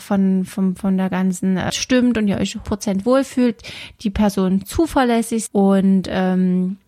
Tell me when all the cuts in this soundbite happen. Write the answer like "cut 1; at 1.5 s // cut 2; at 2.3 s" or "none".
cut 1; at 1.7 s // cut 2; at 2.6 s // cut 3; at 5.5 s